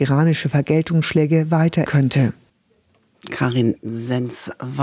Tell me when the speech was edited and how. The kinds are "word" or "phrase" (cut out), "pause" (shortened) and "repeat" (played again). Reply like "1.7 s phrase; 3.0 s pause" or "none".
1.9 s phrase